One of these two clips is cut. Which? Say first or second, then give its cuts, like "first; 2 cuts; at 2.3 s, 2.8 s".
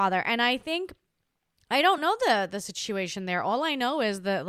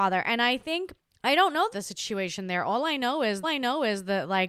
second; 3 cuts; at 1.0 s, 1.7 s, 3.4 s